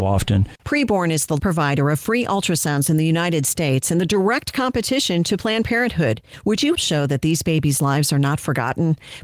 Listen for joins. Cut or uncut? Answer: cut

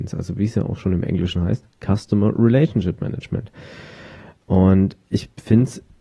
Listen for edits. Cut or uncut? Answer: uncut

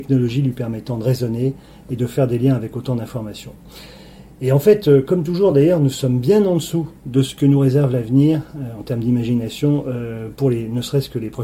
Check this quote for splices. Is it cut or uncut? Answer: uncut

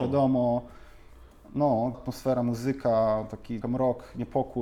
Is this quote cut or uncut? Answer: cut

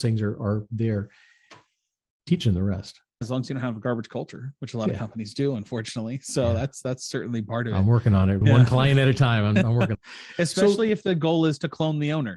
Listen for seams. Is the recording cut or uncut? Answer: cut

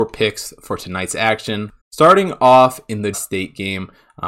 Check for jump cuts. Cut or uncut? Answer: cut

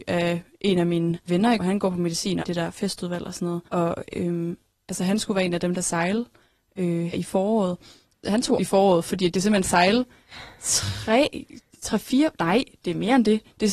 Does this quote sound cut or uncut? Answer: cut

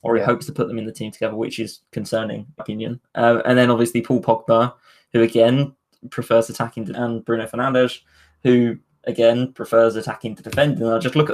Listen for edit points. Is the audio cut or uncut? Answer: cut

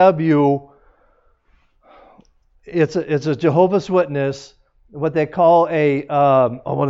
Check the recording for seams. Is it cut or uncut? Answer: uncut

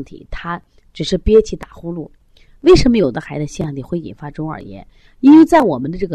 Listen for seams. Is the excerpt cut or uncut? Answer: uncut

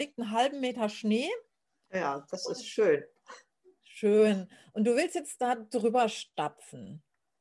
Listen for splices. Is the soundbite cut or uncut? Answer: uncut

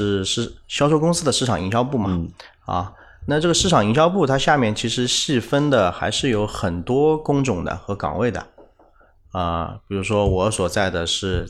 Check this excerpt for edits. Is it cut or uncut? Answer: uncut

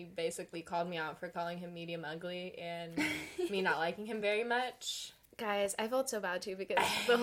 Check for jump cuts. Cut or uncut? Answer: uncut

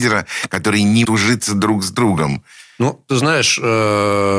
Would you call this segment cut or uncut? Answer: cut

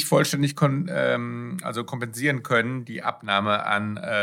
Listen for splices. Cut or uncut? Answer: uncut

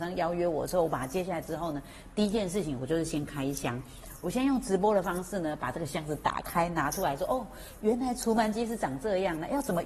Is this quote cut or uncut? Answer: uncut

